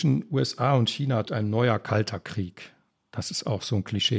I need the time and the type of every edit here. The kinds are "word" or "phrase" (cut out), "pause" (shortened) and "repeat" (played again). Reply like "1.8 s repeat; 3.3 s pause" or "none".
1.3 s word